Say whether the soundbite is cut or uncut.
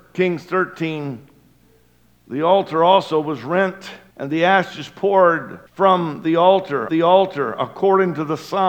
cut